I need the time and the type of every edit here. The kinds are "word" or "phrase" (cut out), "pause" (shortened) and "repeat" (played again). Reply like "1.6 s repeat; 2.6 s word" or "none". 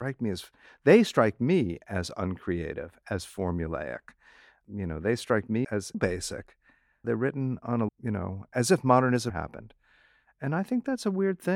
5.6 s word; 5.9 s word; 7.9 s word; 9.3 s word